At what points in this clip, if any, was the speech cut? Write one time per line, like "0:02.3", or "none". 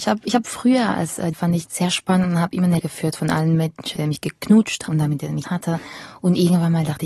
0:01.3
0:01.6
0:02.8
0:04.0
0:04.9
0:05.4